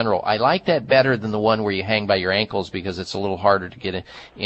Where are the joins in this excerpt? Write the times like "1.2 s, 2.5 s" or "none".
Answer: none